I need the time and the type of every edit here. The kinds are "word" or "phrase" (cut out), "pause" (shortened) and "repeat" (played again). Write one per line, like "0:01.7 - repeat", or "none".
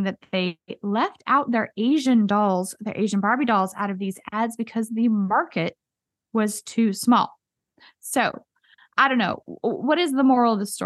none